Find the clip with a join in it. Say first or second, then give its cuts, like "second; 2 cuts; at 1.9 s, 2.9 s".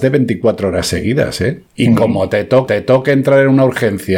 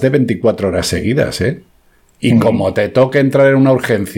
first; 2 cuts; at 1.7 s, 2.7 s